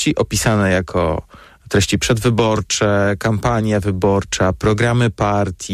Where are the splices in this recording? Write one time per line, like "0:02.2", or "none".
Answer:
none